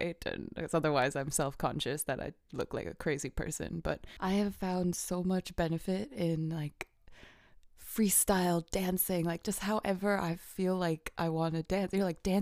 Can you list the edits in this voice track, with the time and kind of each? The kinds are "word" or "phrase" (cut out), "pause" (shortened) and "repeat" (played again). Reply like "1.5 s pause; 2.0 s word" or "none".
none